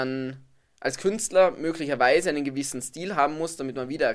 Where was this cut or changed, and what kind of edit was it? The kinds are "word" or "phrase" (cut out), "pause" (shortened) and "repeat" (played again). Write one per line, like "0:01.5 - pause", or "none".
none